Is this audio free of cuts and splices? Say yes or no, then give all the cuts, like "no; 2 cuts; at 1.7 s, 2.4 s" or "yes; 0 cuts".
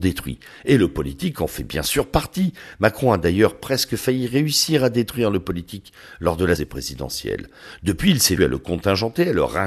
no; 2 cuts; at 6.6 s, 8.4 s